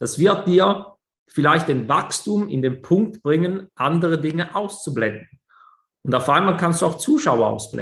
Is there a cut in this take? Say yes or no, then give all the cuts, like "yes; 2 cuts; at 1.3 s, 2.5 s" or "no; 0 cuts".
no; 0 cuts